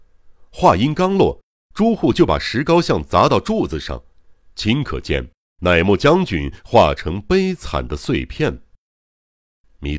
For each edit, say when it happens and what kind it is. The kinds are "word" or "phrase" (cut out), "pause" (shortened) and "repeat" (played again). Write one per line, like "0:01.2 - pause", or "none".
none